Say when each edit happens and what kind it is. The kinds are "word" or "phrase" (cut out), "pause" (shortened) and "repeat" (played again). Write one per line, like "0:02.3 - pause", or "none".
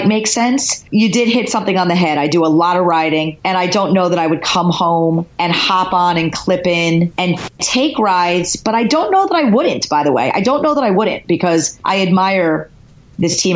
none